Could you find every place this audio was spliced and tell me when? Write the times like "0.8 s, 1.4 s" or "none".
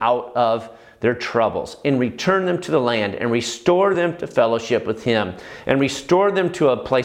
none